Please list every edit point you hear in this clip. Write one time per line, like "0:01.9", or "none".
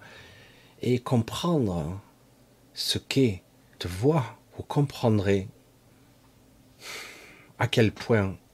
0:03.8
0:04.5